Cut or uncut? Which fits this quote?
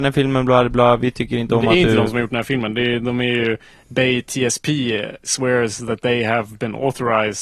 uncut